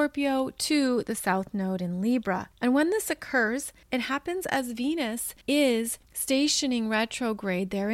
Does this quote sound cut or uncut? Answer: cut